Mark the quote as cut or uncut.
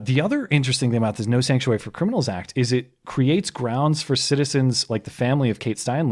uncut